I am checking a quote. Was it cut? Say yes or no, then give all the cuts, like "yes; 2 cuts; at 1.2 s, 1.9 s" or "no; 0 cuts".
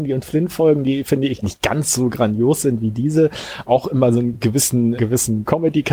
yes; 3 cuts; at 1.4 s, 3.6 s, 5.0 s